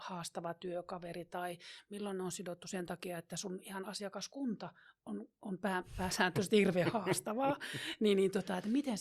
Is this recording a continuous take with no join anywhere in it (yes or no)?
yes